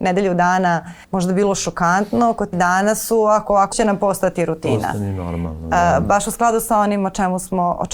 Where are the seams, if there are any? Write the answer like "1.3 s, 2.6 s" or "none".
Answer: 1.0 s, 2.5 s, 3.7 s